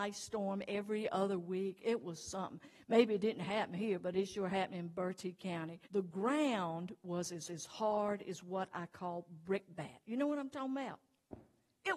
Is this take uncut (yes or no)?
no